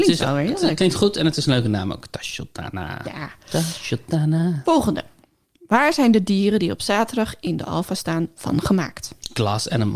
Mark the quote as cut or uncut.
uncut